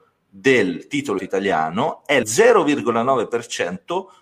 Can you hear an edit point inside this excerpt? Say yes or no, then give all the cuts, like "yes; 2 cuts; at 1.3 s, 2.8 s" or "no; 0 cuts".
yes; 2 cuts; at 1.2 s, 2.2 s